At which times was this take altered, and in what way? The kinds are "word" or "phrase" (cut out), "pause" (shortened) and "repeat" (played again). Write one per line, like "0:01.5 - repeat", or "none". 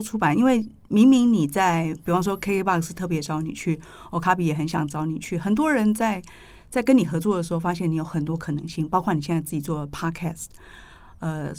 none